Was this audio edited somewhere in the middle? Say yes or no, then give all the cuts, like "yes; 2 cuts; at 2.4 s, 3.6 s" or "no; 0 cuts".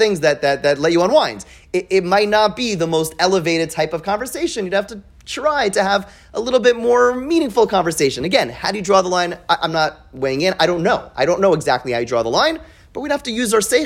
no; 0 cuts